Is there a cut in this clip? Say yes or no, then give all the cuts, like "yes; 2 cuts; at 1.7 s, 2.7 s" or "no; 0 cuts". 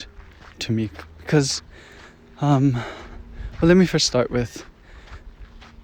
no; 0 cuts